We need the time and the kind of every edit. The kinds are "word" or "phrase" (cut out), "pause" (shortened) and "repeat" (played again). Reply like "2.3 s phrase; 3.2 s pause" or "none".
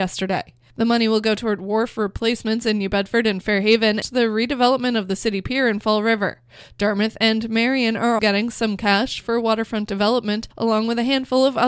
4.0 s word; 8.2 s word